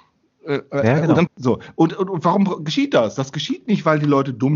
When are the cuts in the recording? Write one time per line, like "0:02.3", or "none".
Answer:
0:01.3